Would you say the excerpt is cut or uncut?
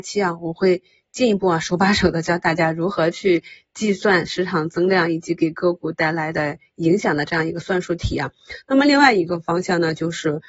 uncut